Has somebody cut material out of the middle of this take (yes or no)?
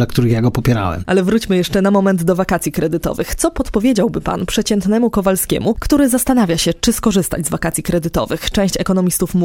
no